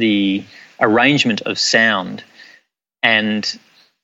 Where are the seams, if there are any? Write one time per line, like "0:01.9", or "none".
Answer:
none